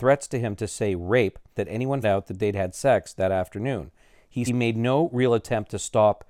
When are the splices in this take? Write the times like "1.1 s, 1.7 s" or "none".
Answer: 1.5 s, 2.0 s, 4.5 s